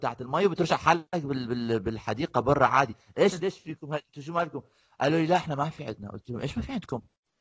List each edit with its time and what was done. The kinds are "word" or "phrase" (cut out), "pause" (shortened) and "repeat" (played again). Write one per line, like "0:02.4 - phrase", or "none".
none